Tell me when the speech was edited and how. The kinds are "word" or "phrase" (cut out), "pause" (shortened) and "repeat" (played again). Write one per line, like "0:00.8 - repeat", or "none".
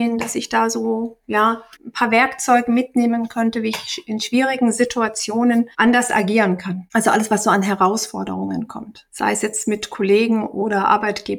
0:01.7 - pause

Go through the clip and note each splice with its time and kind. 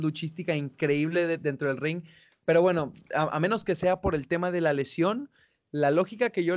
none

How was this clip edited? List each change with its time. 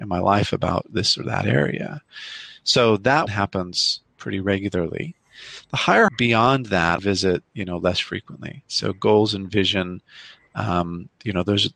0:03.3 - word
0:06.1 - word
0:07.0 - word

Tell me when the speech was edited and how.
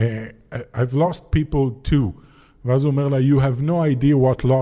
none

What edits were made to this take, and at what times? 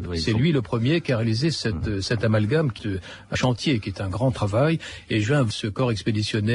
0:02.8 - word
0:03.4 - word
0:05.5 - word

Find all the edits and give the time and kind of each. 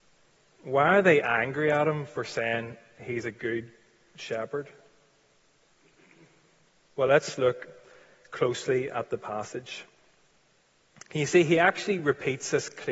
none

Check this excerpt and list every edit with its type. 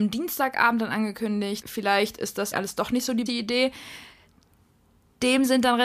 0:01.6 - word
0:02.5 - word
0:03.3 - word

